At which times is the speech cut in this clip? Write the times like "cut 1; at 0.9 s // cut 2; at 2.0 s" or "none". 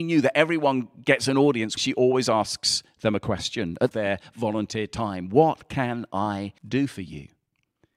cut 1; at 1.8 s // cut 2; at 3.9 s // cut 3; at 6.6 s